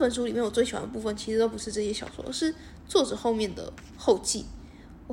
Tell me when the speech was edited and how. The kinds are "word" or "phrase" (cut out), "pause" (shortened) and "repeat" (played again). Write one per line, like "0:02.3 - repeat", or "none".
none